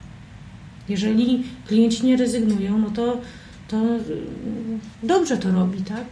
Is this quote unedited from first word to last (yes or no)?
no